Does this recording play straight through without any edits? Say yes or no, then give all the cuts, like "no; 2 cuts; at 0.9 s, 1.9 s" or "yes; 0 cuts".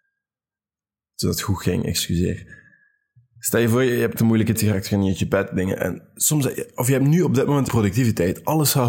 no; 3 cuts; at 4.2 s, 4.5 s, 7.7 s